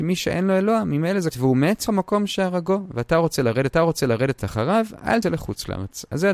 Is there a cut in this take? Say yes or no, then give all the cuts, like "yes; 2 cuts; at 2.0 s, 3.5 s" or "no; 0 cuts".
yes; 4 cuts; at 1.3 s, 1.9 s, 3.7 s, 5.2 s